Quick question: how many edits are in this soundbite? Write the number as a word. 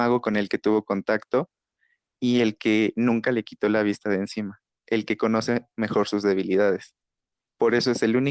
zero